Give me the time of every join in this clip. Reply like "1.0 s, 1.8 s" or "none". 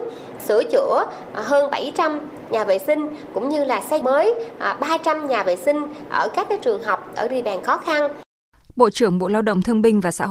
4.0 s